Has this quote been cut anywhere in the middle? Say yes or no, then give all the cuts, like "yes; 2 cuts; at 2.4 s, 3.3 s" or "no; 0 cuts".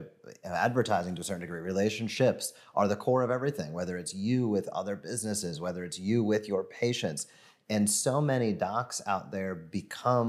no; 0 cuts